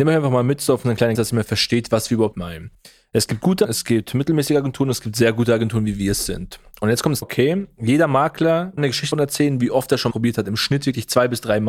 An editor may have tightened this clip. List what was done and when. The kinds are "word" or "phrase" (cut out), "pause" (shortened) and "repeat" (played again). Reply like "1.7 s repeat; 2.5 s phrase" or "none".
1.1 s word; 2.3 s word; 3.6 s word; 7.2 s word; 8.8 s word; 9.1 s word; 10.1 s word